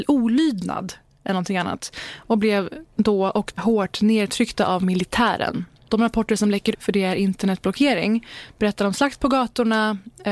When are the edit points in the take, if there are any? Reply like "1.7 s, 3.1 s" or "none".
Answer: 3.5 s, 6.7 s

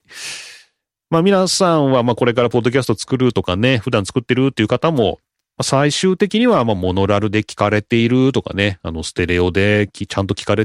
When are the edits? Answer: none

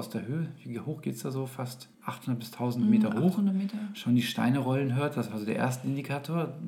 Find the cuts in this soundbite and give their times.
1.9 s

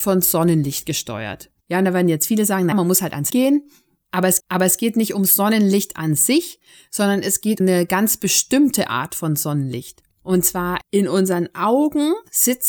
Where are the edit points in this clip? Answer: 1.6 s, 2.7 s, 3.3 s, 4.4 s, 7.6 s, 10.1 s

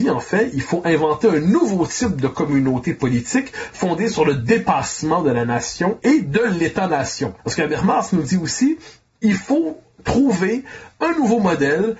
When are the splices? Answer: 7.4 s

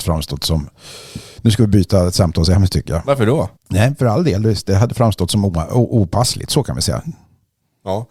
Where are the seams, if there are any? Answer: 3.6 s

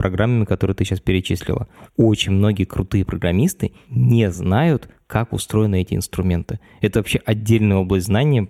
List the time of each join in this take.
none

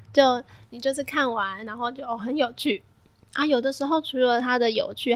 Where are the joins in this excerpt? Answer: none

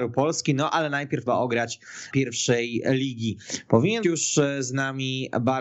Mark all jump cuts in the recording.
1.3 s, 2.1 s, 4.0 s

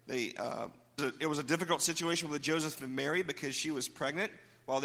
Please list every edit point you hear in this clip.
1.0 s

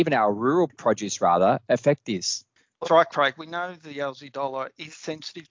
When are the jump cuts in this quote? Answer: 2.8 s

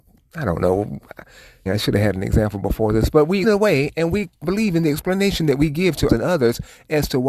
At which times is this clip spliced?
1.7 s, 3.4 s, 4.4 s, 6.1 s

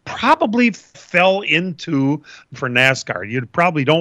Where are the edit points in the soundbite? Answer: 0.9 s, 2.5 s

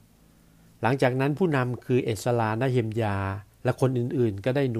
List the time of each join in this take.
3.5 s

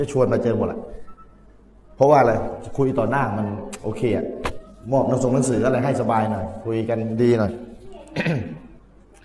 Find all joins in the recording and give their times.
none

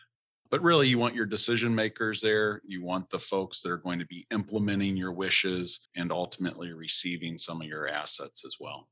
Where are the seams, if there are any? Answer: 5.9 s

